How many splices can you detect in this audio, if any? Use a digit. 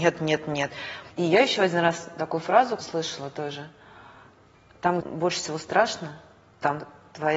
3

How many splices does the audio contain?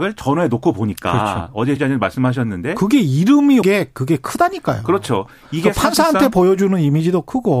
2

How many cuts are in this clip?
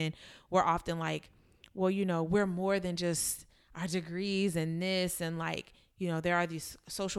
0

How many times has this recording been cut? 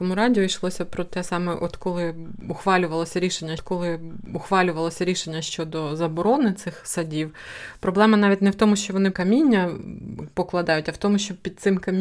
2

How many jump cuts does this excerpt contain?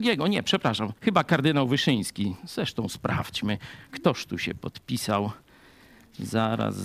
1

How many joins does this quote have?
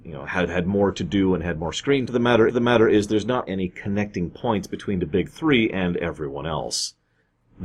3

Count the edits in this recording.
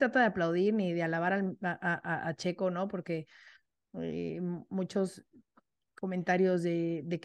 0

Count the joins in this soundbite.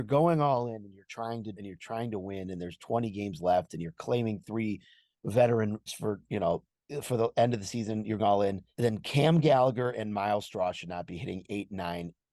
4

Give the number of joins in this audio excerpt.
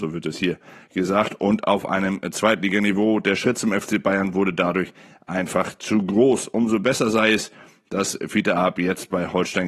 0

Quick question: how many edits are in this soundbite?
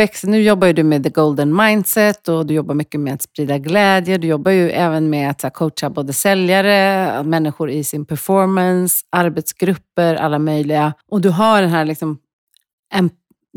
1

